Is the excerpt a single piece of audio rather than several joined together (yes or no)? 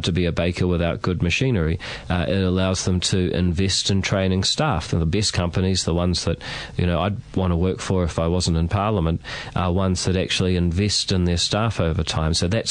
yes